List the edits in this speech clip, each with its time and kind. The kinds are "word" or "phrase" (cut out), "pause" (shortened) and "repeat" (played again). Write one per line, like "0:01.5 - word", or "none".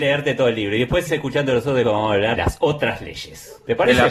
0:01.1 - word
0:01.8 - word
0:02.3 - word